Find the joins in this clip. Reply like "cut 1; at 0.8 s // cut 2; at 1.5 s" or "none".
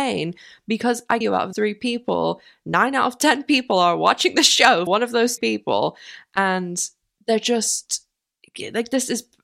cut 1; at 1.2 s // cut 2; at 1.5 s // cut 3; at 4.9 s // cut 4; at 5.4 s